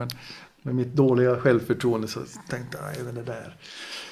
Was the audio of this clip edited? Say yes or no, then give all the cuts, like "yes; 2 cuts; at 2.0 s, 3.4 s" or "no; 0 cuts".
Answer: no; 0 cuts